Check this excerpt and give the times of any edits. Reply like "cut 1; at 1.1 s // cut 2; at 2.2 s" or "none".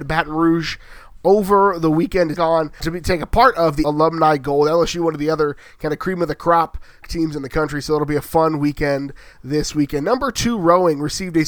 cut 1; at 2.4 s // cut 2; at 2.8 s // cut 3; at 3.8 s // cut 4; at 7.0 s